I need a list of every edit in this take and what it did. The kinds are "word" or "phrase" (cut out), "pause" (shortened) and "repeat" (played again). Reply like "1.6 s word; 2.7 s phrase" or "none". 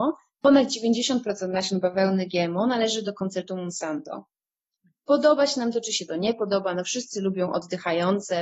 none